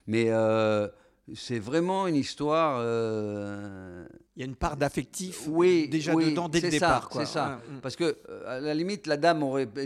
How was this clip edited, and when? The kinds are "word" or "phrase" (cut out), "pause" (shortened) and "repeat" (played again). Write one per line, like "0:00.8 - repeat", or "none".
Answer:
0:04.3 - pause